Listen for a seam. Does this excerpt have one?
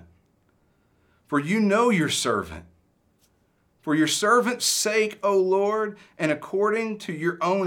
no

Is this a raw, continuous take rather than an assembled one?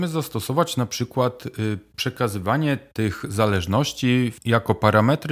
yes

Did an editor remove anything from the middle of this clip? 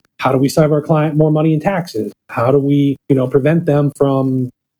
yes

